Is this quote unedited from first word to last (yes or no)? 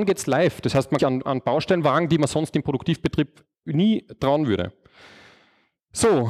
no